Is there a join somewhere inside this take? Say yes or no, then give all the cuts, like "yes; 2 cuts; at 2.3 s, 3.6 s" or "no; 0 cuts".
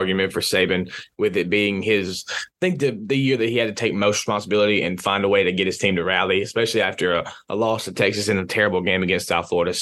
no; 0 cuts